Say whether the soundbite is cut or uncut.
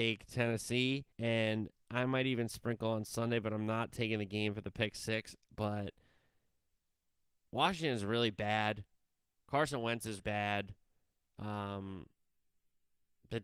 cut